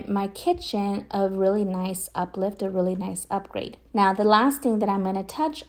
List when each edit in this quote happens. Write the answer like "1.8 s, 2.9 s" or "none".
3.9 s

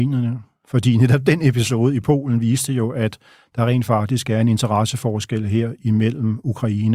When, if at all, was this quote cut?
none

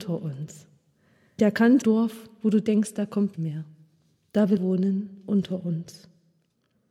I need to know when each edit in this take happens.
1.4 s, 1.8 s, 3.3 s, 4.6 s

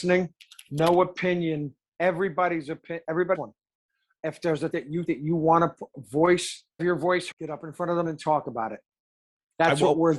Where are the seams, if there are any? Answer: 3.3 s, 4.7 s, 5.1 s, 5.9 s, 6.8 s, 7.3 s, 8.0 s

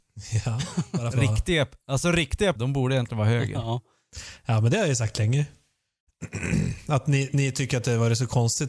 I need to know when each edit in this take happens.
1.1 s, 2.6 s

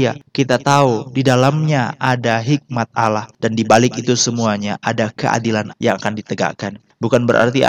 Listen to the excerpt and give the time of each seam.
5.7 s

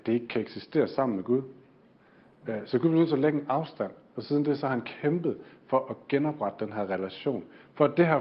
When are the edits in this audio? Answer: none

